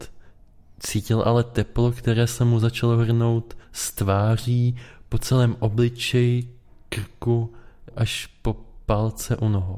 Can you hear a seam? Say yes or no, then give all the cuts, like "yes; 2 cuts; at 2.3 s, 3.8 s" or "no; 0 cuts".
yes; 2 cuts; at 3.6 s, 7.9 s